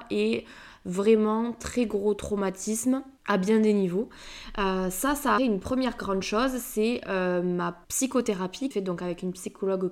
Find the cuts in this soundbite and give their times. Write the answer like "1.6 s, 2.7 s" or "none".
3.2 s, 5.4 s, 7.8 s, 8.7 s